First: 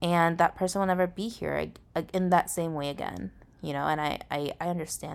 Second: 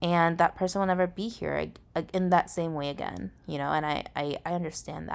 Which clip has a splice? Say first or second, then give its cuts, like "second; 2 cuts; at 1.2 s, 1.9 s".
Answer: second; 1 cut; at 3.4 s